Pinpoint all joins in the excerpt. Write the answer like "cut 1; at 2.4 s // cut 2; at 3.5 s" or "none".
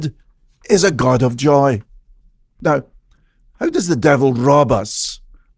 none

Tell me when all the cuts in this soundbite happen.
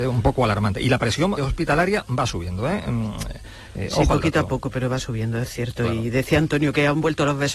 cut 1; at 1.4 s

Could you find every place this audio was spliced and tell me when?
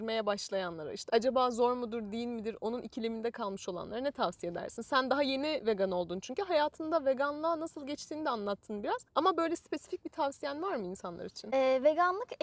cut 1; at 9.1 s

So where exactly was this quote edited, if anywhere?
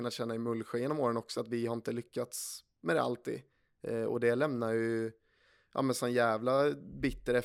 none

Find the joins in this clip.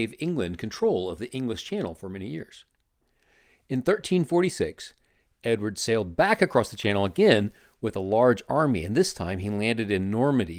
none

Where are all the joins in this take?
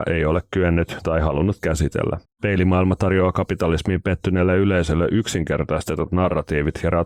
cut 1; at 2.2 s

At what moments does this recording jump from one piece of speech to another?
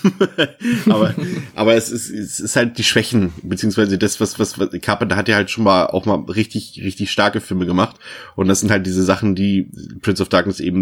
cut 1; at 4.4 s

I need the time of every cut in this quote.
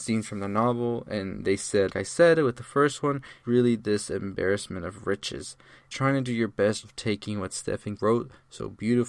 cut 1; at 1.9 s // cut 2; at 3.4 s // cut 3; at 5.9 s // cut 4; at 6.8 s // cut 5; at 8.0 s

